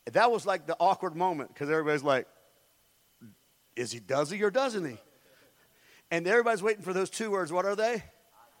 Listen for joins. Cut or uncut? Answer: uncut